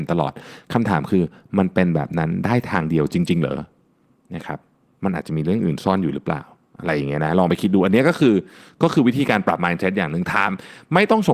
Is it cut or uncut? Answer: uncut